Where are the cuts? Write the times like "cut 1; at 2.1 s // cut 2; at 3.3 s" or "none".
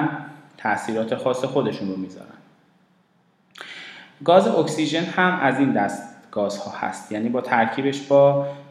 none